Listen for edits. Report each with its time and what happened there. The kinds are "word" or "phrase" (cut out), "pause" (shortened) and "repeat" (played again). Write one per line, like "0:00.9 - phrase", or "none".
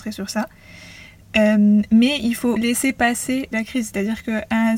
0:02.6 - word
0:03.5 - word